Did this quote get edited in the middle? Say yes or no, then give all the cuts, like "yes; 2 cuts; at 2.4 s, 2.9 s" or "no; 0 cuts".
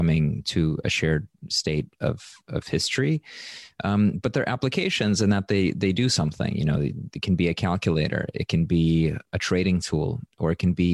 no; 0 cuts